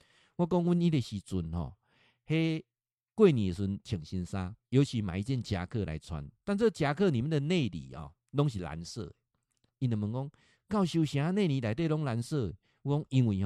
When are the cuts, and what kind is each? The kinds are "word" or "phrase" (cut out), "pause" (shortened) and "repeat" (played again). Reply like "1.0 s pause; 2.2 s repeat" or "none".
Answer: 4.6 s pause